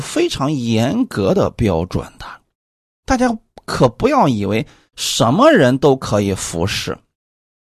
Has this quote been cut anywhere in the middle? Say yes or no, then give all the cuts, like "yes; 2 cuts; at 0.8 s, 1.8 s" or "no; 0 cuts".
no; 0 cuts